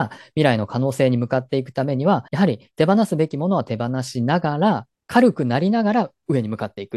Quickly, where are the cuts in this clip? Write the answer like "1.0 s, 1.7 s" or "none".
2.3 s, 4.9 s